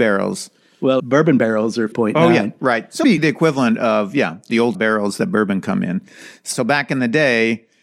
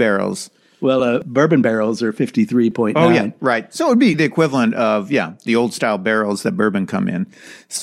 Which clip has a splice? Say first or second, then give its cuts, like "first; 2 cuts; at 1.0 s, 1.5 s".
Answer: first; 4 cuts; at 1.0 s, 1.9 s, 3.0 s, 4.7 s